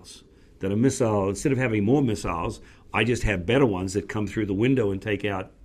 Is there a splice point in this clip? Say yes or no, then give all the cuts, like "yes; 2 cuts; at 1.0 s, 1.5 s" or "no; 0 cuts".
no; 0 cuts